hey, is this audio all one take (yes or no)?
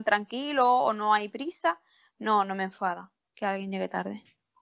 yes